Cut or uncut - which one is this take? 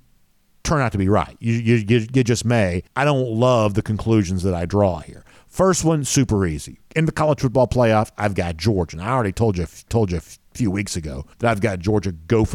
cut